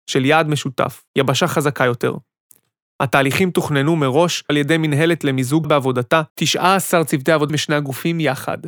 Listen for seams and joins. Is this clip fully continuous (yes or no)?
no